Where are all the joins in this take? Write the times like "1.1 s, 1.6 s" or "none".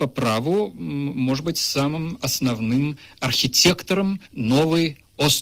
4.3 s